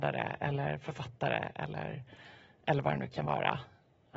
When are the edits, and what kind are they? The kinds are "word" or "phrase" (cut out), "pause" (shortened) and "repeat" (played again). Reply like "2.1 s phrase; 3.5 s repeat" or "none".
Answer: none